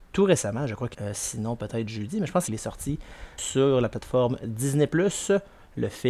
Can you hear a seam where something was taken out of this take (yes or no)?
yes